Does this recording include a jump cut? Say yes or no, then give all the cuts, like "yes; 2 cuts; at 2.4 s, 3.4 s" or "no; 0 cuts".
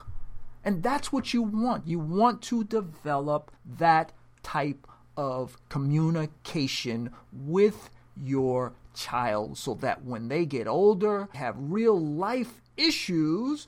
yes; 2 cuts; at 3.6 s, 11.3 s